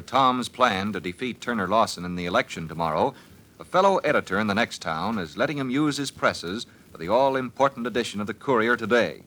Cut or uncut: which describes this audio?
uncut